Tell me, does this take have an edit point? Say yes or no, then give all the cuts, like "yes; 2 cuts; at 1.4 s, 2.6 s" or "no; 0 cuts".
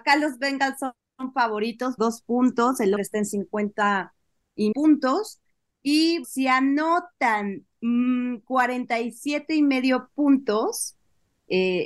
yes; 4 cuts; at 2.0 s, 3.0 s, 4.7 s, 6.2 s